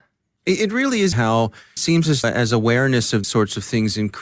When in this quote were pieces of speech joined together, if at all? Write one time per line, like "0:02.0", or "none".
0:01.1
0:01.8
0:02.2
0:03.2